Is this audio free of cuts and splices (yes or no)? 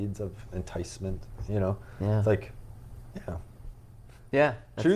yes